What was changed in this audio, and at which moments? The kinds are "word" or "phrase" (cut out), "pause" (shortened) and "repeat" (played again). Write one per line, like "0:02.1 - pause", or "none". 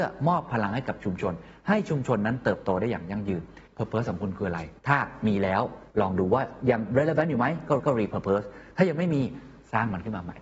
0:03.7 - pause
0:04.8 - pause
0:05.9 - pause
0:07.8 - repeat